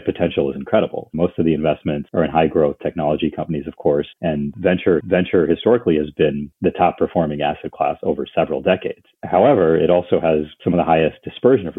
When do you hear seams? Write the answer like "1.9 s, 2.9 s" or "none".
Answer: 4.1 s, 5.0 s